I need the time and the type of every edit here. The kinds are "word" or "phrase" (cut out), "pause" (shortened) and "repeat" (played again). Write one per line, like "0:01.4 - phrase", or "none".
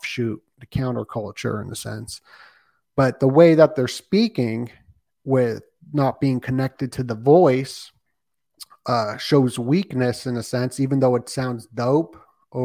none